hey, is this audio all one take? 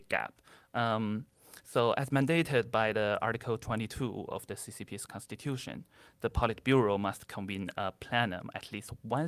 yes; 0 cuts

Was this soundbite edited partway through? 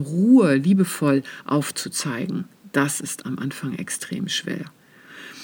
no; 0 cuts

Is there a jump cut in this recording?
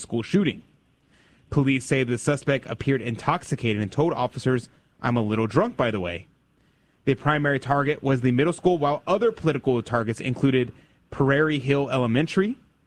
no; 0 cuts

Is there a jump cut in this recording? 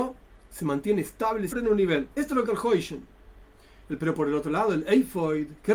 yes; 4 cuts; at 1.5 s, 2.1 s, 2.4 s, 4.0 s

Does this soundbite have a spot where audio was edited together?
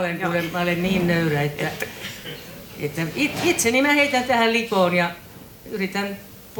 no; 0 cuts

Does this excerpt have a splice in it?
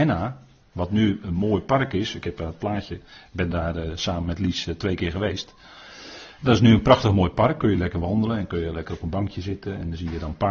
no; 0 cuts

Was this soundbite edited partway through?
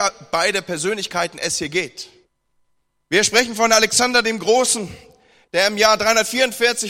yes; 1 cut; at 2.5 s

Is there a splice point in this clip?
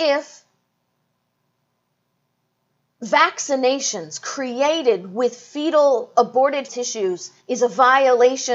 yes; 2 cuts; at 6.7 s, 7.4 s

